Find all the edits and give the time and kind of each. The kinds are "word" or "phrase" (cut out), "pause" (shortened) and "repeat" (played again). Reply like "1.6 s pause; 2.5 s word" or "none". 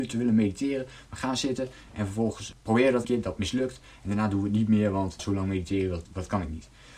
2.5 s word; 3.0 s word; 5.2 s word; 6.0 s word